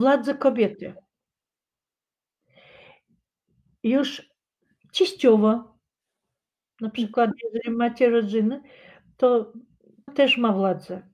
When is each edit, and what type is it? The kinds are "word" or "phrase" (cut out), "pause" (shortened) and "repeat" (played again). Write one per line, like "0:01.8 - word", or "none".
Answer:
0:10.1 - word